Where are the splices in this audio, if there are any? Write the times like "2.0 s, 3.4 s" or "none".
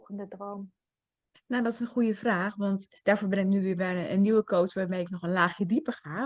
3.0 s